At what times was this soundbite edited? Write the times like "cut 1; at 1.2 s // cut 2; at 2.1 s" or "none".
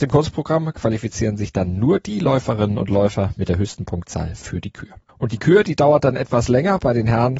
cut 1; at 5.1 s